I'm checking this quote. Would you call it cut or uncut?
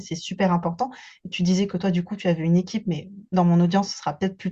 uncut